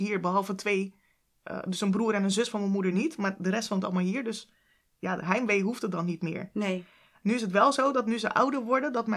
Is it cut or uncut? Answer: uncut